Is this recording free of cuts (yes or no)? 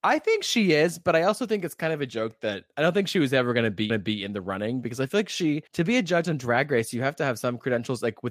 no